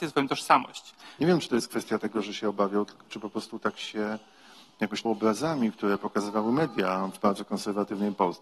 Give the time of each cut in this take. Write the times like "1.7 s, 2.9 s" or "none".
5.0 s